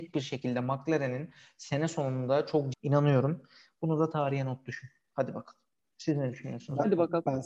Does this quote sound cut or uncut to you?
cut